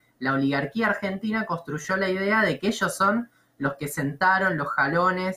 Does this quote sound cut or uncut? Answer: uncut